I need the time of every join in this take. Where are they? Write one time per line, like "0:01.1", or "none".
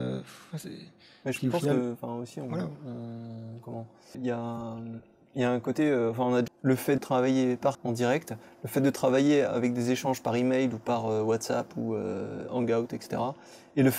0:04.1
0:06.5
0:07.0
0:07.7